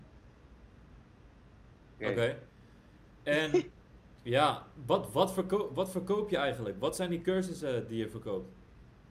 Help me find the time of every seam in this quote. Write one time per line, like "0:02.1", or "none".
none